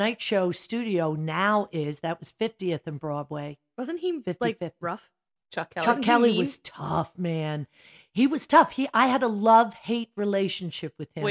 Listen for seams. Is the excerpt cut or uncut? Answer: uncut